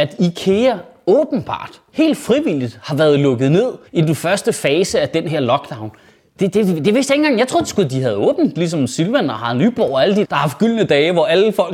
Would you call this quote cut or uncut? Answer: cut